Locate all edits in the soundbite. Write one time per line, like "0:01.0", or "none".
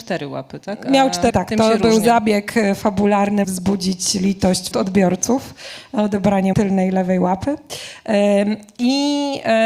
0:01.3
0:03.4
0:04.7
0:06.5